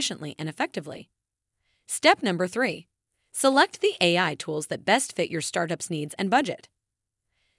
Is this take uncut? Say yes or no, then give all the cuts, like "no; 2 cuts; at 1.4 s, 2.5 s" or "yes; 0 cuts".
yes; 0 cuts